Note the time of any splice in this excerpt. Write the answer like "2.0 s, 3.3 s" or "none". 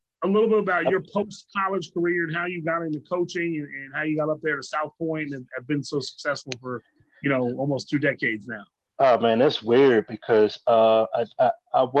8.8 s